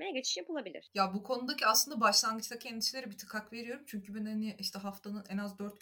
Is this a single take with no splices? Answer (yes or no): yes